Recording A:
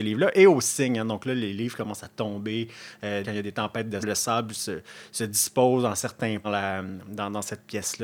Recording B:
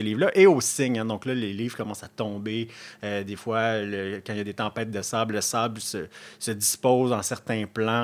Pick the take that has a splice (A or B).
A